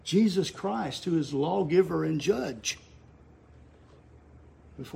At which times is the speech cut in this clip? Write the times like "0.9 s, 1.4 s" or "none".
none